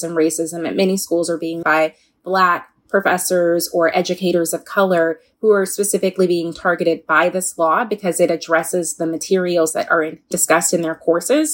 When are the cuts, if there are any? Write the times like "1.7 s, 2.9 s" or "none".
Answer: 1.6 s, 10.3 s